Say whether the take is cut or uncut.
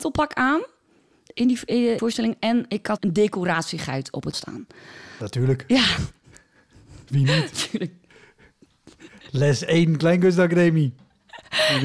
cut